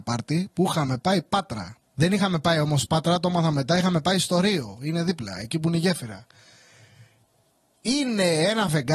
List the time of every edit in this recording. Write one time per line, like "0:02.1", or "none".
0:01.8